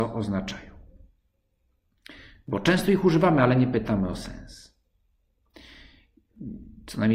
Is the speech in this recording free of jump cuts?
yes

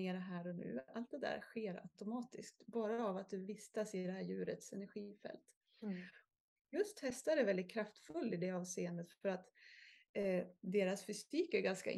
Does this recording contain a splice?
no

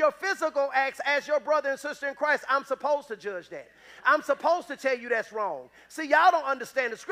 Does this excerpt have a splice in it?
no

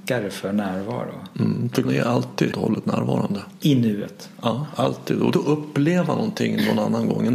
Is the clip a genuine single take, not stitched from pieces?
no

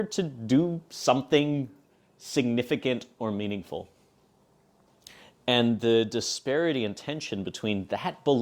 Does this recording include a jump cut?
no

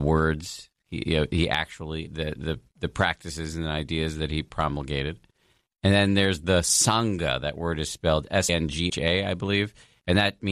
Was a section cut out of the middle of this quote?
yes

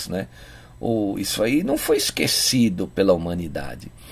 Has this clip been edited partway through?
no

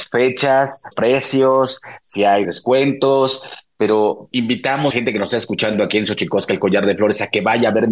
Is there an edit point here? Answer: yes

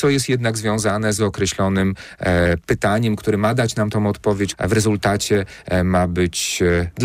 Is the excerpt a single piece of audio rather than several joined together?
no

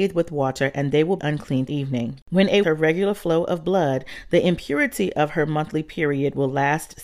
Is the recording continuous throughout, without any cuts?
no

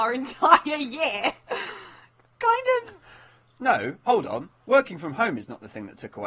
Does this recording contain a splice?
no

